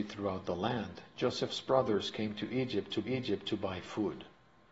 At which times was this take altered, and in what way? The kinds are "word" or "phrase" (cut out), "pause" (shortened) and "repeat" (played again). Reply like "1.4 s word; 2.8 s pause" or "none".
3.0 s repeat